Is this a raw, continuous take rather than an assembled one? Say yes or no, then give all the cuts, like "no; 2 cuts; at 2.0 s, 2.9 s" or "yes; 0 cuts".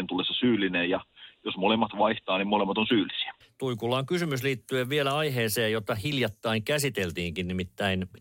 no; 1 cut; at 3.4 s